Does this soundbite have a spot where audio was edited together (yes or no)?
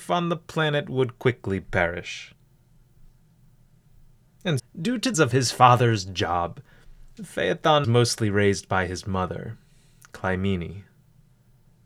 yes